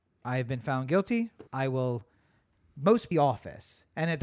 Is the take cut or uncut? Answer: cut